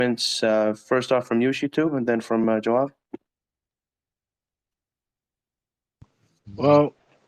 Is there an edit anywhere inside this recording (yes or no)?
no